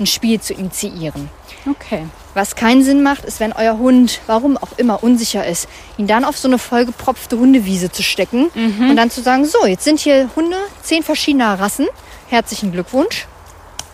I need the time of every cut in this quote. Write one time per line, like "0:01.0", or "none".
none